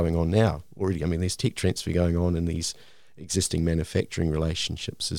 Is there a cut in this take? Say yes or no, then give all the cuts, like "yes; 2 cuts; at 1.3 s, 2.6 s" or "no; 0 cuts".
no; 0 cuts